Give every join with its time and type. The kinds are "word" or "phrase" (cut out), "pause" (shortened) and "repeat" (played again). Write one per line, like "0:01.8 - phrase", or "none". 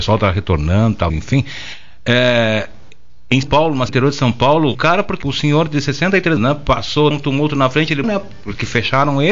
0:01.1 - word
0:03.4 - word
0:03.9 - word
0:04.7 - word
0:05.2 - word
0:06.4 - word
0:07.1 - word
0:08.0 - word